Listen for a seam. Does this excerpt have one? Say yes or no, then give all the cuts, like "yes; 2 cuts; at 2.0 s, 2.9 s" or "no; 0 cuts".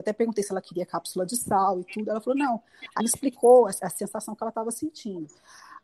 yes; 2 cuts; at 3.0 s, 3.8 s